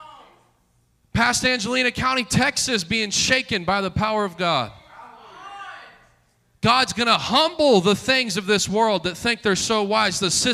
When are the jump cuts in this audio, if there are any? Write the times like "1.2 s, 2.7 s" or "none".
none